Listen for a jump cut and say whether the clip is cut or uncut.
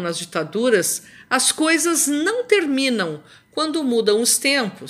uncut